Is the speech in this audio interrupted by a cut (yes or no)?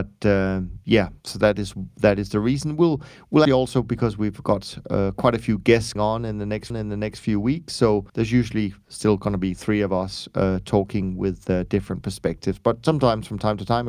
yes